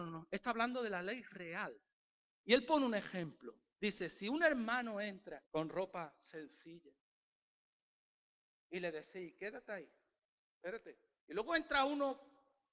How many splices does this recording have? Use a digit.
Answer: 1